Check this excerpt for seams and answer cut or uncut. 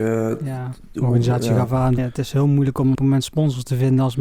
cut